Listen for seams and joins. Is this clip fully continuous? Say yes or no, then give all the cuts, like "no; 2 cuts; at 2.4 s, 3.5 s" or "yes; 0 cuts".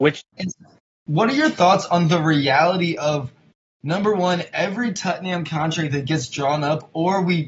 yes; 0 cuts